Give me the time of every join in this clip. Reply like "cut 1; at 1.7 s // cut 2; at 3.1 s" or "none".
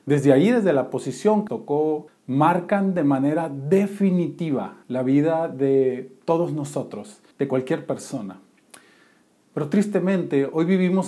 cut 1; at 1.5 s // cut 2; at 2.1 s // cut 3; at 4.8 s // cut 4; at 7.3 s